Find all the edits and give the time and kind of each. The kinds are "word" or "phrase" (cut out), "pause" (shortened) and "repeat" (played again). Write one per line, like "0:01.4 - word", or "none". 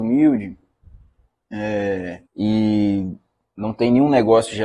0:02.3 - pause